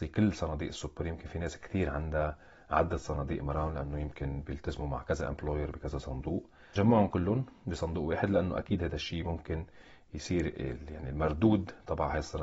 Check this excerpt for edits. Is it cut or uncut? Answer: uncut